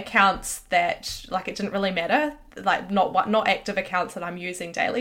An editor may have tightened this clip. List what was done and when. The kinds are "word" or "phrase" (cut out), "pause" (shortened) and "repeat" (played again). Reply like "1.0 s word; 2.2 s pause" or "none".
none